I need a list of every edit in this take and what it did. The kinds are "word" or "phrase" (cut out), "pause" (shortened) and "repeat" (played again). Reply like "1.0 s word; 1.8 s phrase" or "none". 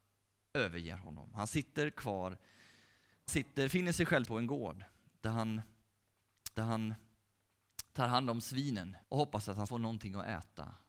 3.3 s word; 4.3 s word; 6.5 s repeat; 9.0 s pause; 9.7 s word